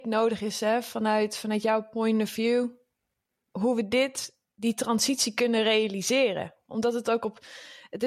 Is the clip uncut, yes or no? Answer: yes